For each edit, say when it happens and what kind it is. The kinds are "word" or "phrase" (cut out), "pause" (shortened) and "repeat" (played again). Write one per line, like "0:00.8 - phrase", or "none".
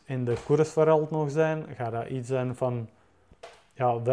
none